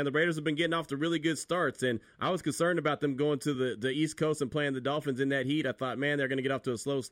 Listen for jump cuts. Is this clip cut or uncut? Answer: uncut